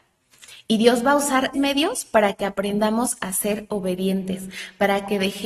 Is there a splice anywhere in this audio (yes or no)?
yes